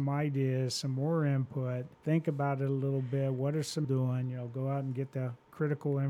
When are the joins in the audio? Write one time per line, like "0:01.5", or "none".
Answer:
0:01.9
0:03.8